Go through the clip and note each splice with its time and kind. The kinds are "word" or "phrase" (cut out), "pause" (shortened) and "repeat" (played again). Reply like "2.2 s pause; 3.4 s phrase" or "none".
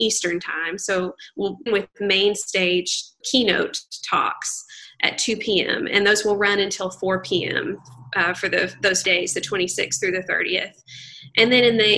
1.7 s word; 3.2 s word; 9.0 s word